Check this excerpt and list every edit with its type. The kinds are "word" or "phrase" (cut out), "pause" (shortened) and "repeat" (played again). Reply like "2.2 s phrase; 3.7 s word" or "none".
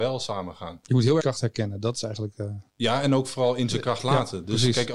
1.2 s phrase; 2.7 s pause